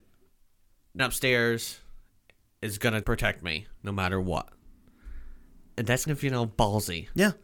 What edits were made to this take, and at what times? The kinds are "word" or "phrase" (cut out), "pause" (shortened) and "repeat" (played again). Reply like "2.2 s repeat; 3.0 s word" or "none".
1.0 s word; 3.0 s word; 6.1 s word